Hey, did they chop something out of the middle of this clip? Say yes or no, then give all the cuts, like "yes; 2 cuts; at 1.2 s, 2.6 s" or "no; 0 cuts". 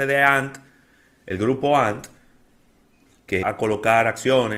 yes; 1 cut; at 3.4 s